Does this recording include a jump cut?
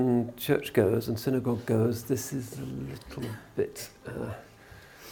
no; 0 cuts

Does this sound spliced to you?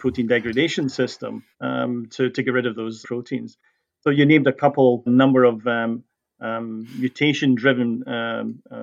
yes; 3 cuts; at 1.5 s, 3.0 s, 5.1 s

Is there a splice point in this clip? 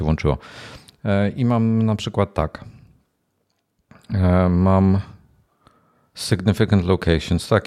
no; 0 cuts

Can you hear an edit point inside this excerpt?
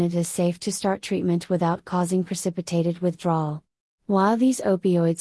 no; 0 cuts

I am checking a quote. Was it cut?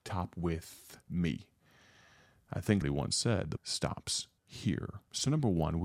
yes; 4 cuts; at 1.0 s, 2.8 s, 3.6 s, 4.4 s

